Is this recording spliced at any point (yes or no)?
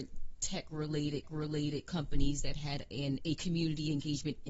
yes